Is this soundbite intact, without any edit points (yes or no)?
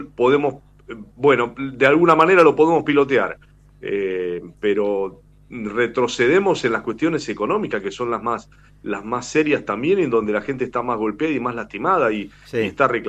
yes